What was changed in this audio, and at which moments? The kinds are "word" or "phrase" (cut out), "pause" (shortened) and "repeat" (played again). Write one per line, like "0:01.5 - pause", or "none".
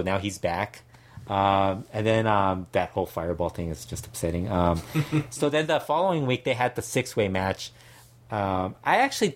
none